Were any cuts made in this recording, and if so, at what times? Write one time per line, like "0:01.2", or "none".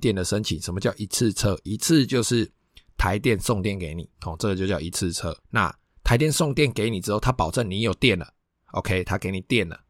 0:04.1
0:05.4